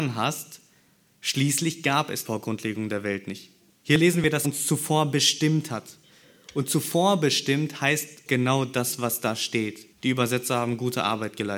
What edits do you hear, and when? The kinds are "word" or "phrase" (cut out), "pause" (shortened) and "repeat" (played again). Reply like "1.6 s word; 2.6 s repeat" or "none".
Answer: 2.3 s word; 3.7 s pause; 4.4 s word; 8.3 s word; 9.9 s pause